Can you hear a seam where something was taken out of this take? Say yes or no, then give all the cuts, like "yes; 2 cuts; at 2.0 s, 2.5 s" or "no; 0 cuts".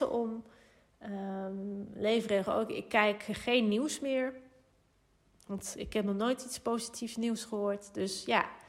no; 0 cuts